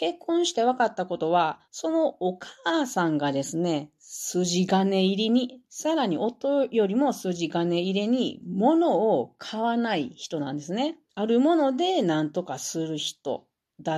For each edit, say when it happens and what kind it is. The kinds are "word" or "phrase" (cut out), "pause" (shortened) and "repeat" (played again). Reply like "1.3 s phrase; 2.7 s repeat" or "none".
1.6 s pause; 11.1 s pause